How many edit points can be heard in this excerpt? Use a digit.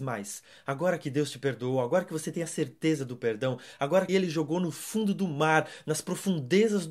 1